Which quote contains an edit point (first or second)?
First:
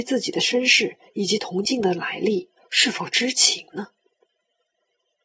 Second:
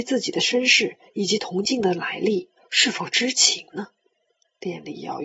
second